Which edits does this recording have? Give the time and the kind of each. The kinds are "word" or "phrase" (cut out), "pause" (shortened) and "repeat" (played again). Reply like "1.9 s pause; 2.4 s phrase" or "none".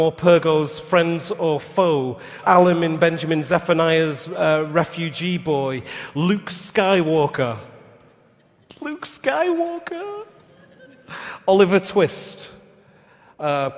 2.4 s word